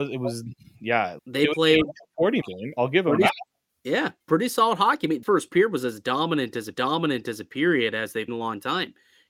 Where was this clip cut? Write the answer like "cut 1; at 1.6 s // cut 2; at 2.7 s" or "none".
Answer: cut 1; at 1.2 s // cut 2; at 2.4 s // cut 3; at 4.2 s // cut 4; at 5.2 s // cut 5; at 6.7 s // cut 6; at 8.3 s